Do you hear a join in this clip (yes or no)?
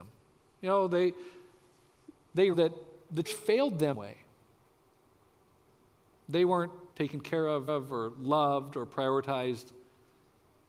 yes